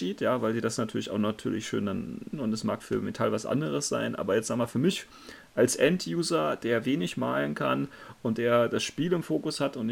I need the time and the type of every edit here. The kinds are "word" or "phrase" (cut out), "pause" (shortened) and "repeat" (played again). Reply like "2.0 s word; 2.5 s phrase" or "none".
2.3 s word; 2.8 s word